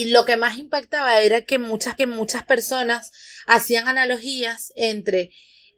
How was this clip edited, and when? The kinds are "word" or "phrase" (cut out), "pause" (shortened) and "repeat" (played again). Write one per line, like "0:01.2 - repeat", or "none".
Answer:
0:02.0 - repeat